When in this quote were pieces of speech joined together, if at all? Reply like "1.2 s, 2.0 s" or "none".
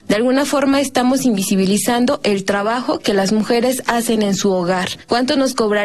none

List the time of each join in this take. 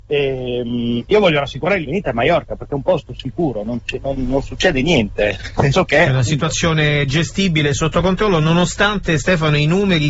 1.8 s, 4.2 s, 5.7 s

